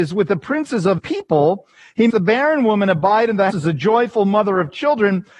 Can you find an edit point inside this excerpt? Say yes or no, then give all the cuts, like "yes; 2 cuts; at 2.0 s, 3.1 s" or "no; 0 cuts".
yes; 3 cuts; at 1.0 s, 2.1 s, 3.5 s